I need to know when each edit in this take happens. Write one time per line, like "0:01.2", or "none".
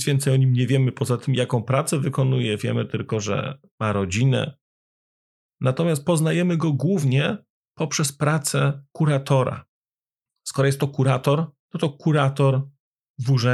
none